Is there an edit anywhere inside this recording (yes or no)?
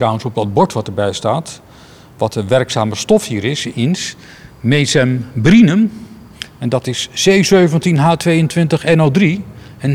no